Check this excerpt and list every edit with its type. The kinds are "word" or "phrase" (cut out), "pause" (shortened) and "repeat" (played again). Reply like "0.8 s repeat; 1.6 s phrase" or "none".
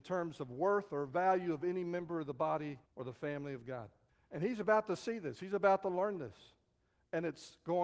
2.9 s pause; 4.1 s pause